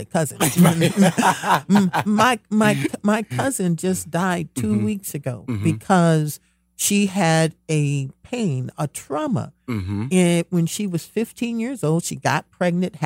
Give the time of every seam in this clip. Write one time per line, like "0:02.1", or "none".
none

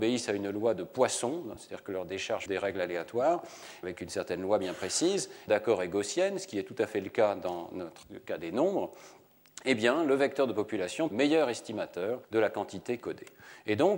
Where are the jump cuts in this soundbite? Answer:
0:02.5
0:03.8
0:05.5
0:08.0
0:11.1
0:12.2
0:13.0

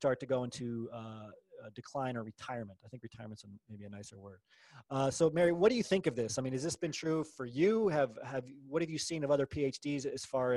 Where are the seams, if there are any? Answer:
none

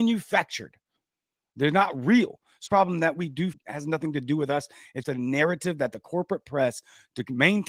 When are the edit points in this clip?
0:02.7
0:03.5
0:05.0

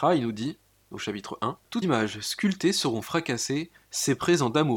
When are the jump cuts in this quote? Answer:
0:01.8

